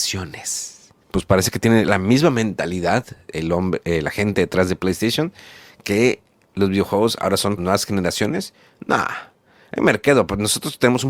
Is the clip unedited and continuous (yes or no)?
no